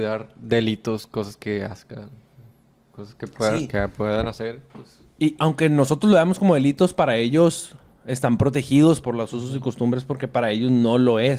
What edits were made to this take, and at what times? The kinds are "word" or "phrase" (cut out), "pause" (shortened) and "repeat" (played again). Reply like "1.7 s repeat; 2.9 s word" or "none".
5.4 s word; 9.0 s word